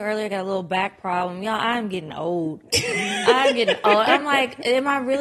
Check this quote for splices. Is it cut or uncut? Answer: uncut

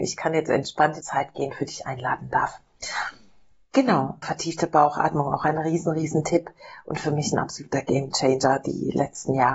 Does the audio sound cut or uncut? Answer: cut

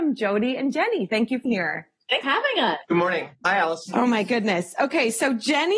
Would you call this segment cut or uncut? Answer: cut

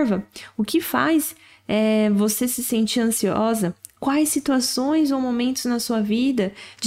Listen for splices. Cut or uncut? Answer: uncut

